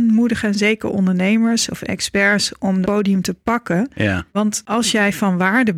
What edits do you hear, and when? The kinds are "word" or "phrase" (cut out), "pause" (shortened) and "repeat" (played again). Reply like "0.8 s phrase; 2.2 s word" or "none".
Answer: 2.8 s word; 4.3 s pause